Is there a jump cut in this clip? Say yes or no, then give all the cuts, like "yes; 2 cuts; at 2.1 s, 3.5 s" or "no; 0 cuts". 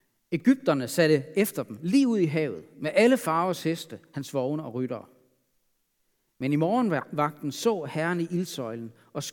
no; 0 cuts